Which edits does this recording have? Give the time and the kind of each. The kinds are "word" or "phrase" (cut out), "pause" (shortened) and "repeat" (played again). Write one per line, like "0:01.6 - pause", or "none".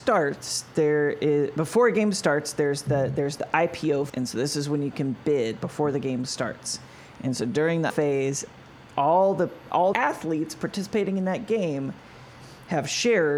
0:04.1 - word
0:07.9 - word
0:09.9 - word